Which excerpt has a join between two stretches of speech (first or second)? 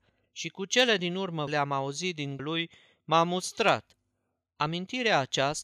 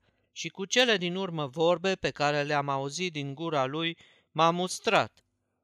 first